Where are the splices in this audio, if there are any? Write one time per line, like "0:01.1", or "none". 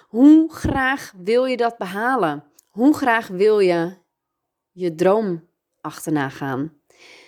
0:02.6